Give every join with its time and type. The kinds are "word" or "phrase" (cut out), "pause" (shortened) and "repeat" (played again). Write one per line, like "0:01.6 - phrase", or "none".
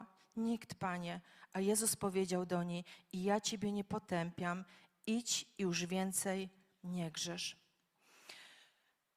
none